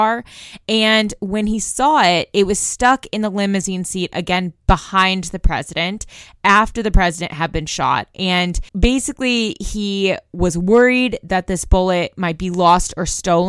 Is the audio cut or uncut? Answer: cut